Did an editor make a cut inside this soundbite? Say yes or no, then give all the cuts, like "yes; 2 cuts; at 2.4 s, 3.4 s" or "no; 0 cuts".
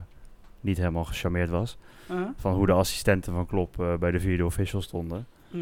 no; 0 cuts